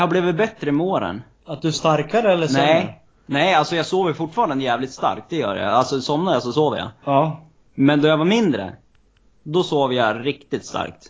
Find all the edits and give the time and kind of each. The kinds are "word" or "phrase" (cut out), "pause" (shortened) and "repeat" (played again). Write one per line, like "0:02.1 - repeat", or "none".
0:01.4 - pause
0:01.7 - word